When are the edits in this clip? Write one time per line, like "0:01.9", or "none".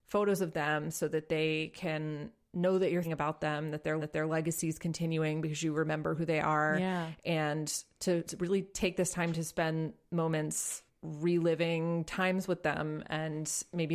0:03.0
0:04.0
0:10.9